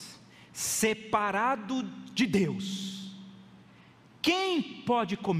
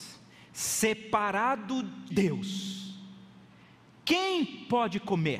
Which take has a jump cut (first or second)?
second